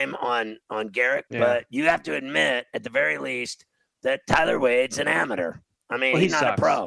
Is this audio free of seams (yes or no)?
no